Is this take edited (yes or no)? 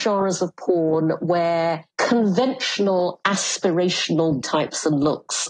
yes